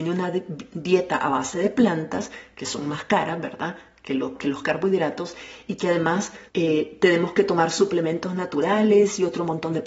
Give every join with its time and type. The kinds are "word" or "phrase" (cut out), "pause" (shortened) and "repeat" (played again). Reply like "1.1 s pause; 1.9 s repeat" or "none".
6.5 s pause